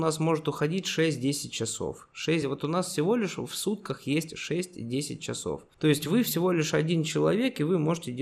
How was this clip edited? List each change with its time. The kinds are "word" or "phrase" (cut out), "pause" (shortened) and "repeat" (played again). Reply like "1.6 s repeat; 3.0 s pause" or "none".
none